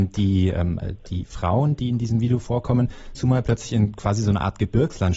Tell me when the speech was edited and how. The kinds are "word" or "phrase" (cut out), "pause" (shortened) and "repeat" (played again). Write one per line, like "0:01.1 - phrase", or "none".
0:03.1 - phrase